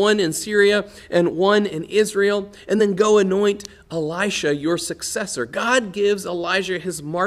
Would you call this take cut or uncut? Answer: uncut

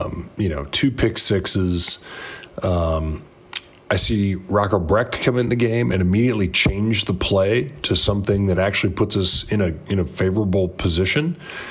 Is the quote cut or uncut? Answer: uncut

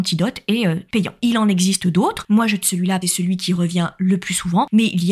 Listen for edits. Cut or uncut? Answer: cut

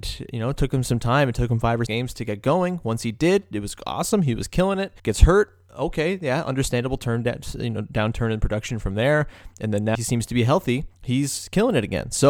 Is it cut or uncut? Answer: cut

